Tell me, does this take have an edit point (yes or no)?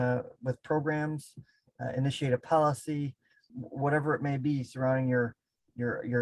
no